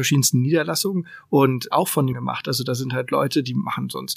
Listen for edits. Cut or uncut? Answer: cut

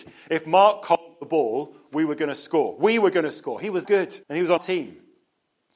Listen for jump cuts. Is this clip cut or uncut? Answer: cut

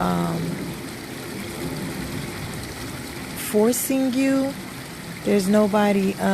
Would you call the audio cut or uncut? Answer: cut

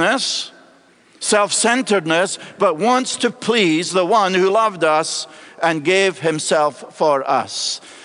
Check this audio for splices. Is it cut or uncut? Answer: uncut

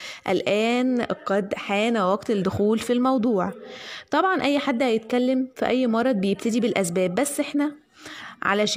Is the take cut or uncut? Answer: uncut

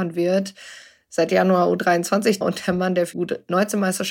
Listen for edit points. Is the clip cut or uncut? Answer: cut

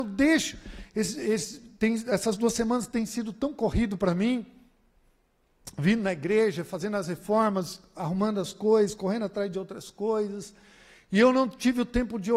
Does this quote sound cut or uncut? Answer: uncut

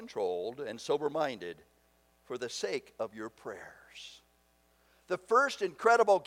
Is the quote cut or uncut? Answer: uncut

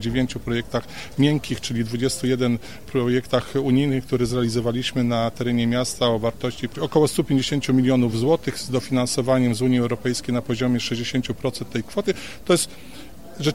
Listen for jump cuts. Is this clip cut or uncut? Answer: uncut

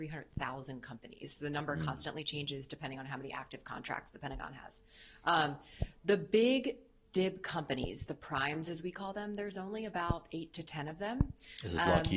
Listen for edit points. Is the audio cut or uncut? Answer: uncut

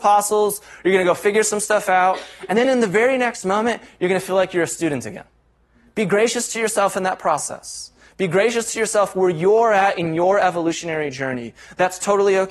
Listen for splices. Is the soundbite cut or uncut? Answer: uncut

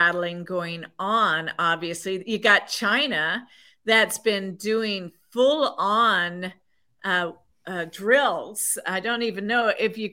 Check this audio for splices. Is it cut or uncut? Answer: uncut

